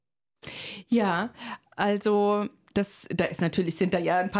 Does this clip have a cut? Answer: no; 0 cuts

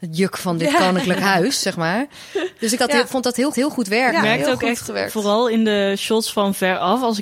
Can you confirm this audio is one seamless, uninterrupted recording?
no; 2 cuts; at 2.8 s, 3.5 s

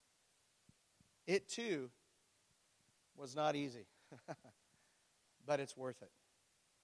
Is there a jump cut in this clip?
no; 0 cuts

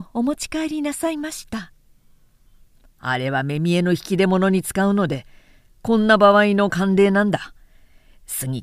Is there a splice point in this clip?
no; 0 cuts

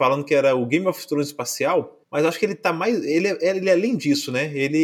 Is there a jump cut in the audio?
yes; 1 cut; at 2.0 s

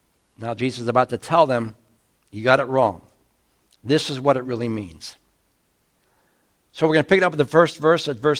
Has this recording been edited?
no; 0 cuts

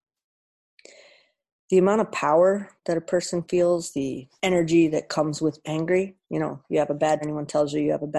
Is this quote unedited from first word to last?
no; 5 cuts; at 2.8 s, 4.4 s, 5.6 s, 6.2 s, 7.2 s

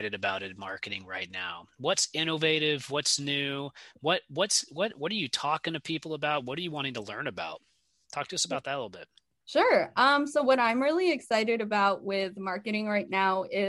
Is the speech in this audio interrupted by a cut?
no; 0 cuts

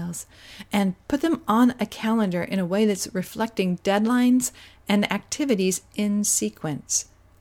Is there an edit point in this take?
no; 0 cuts

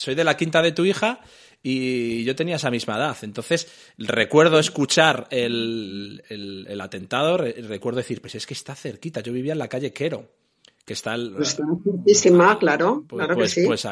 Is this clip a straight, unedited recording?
yes; 0 cuts

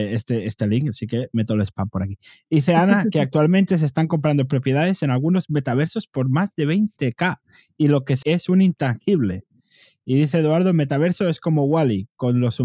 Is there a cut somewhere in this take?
yes; 1 cut; at 8.2 s

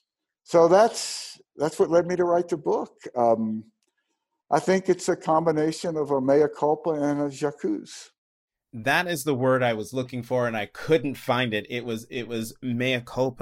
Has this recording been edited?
no; 0 cuts

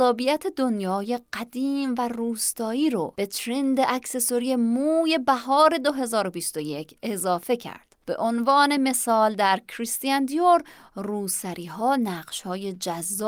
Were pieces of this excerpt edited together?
no; 0 cuts

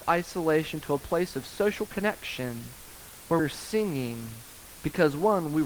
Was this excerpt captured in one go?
no; 1 cut; at 3.4 s

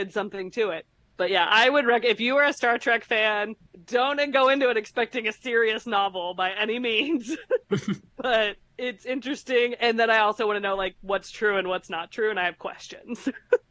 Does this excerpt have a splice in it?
yes; 3 cuts; at 1.0 s, 3.7 s, 8.6 s

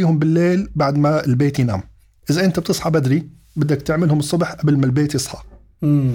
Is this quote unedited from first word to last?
yes; 0 cuts

